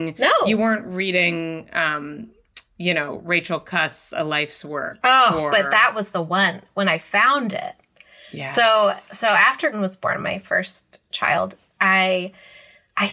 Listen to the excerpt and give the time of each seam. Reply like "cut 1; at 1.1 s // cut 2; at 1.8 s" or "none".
cut 1; at 9.7 s